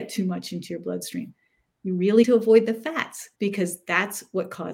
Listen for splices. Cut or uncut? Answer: cut